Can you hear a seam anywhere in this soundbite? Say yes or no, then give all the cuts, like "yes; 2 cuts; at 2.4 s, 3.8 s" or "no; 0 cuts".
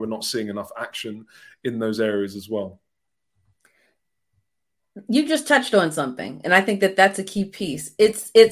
no; 0 cuts